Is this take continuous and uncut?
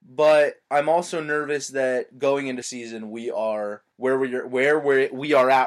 no; 2 cuts; at 2.6 s, 3.9 s

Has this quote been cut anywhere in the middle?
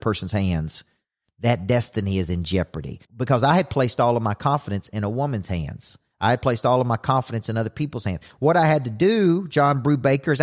yes; 2 cuts; at 3.0 s, 6.1 s

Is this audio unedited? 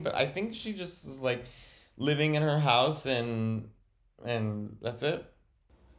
yes; 0 cuts

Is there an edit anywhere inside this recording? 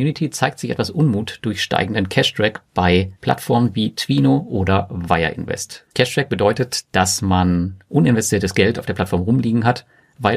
yes; 2 cuts; at 3.2 s, 5.9 s

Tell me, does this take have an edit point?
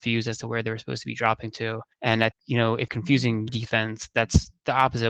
yes; 4 cuts; at 1.9 s, 2.3 s, 2.9 s, 3.5 s

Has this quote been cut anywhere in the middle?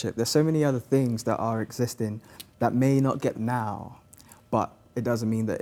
yes; 1 cut; at 3.3 s

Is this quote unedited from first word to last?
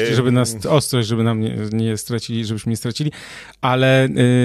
yes; 0 cuts

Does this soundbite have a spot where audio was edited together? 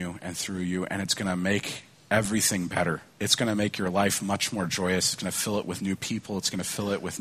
yes; 1 cut; at 3.1 s

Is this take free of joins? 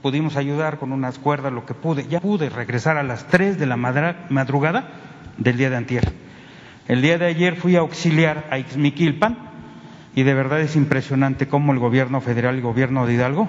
no; 1 cut; at 2.2 s

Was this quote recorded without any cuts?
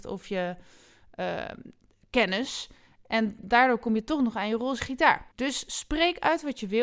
no; 1 cut; at 5.3 s

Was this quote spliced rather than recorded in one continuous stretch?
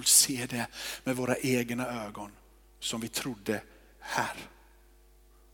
no; 0 cuts

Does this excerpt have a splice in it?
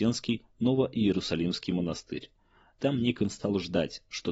no; 0 cuts

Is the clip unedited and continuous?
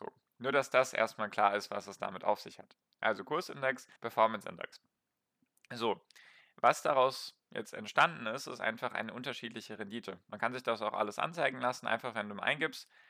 no; 1 cut; at 4.0 s

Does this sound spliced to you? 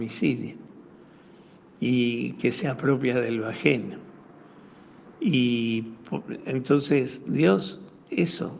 yes; 1 cut; at 5.1 s

